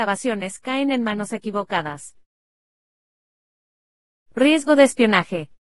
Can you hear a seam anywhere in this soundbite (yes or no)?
no